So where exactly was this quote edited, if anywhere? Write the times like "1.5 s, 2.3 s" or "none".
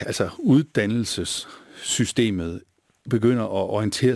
none

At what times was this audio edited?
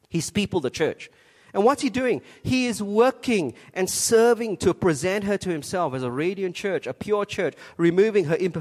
none

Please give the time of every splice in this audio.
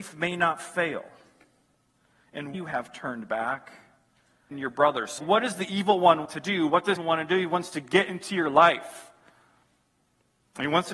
2.5 s, 4.5 s, 5.2 s, 6.2 s, 7.0 s

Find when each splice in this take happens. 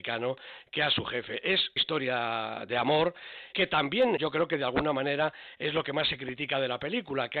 1.8 s, 3.5 s, 4.2 s

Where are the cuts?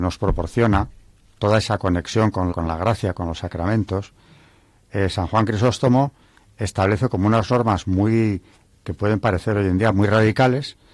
2.5 s

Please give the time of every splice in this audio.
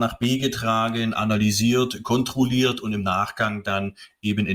none

